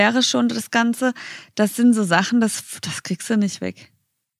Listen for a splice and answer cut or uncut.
uncut